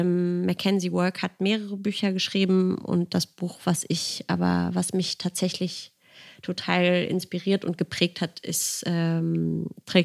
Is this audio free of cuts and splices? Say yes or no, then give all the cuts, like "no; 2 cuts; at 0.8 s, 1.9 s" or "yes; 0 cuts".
yes; 0 cuts